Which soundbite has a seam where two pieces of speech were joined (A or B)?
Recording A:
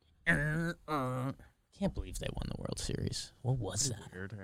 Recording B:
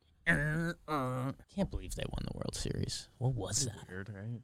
B